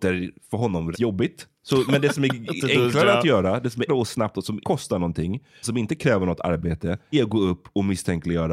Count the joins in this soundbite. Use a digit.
5